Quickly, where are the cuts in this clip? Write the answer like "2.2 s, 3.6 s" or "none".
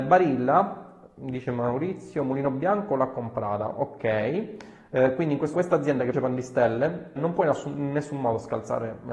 5.5 s, 6.1 s, 7.2 s